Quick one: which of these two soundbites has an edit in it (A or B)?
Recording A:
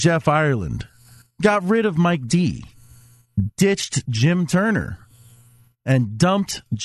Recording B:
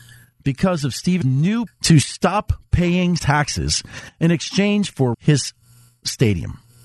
B